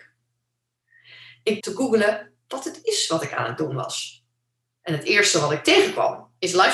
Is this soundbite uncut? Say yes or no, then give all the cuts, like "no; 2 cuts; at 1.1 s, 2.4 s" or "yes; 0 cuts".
no; 1 cut; at 1.6 s